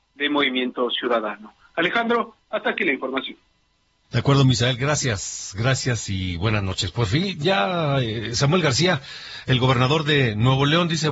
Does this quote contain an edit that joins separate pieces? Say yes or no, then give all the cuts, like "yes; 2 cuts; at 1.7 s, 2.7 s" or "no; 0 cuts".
no; 0 cuts